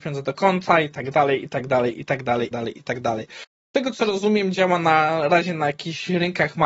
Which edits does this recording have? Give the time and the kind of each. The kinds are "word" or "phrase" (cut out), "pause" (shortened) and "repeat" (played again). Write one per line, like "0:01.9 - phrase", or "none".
0:02.5 - phrase